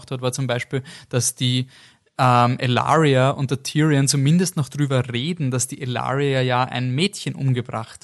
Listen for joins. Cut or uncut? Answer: uncut